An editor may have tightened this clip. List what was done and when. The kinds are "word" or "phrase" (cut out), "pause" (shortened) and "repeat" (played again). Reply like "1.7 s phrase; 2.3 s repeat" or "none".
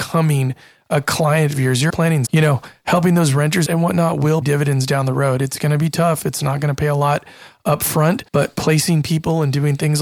1.9 s word; 2.3 s phrase; 3.7 s word; 4.4 s word; 8.3 s pause